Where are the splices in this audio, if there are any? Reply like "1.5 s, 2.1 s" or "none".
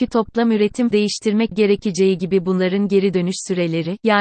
0.9 s, 1.5 s